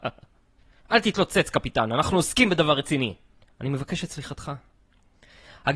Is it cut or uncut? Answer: cut